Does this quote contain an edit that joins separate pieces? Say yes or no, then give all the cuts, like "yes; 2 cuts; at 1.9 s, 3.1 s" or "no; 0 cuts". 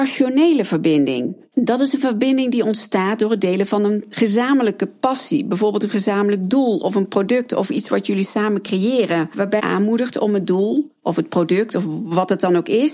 yes; 2 cuts; at 1.5 s, 9.6 s